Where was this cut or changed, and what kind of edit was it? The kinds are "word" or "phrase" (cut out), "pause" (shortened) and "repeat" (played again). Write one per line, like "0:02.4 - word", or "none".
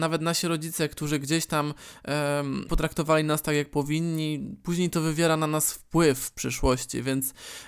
0:02.7 - word